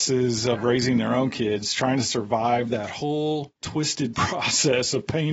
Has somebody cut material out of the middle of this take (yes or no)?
yes